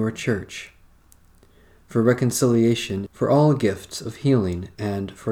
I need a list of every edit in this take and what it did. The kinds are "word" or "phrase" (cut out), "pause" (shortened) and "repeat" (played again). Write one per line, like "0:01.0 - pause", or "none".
0:03.1 - phrase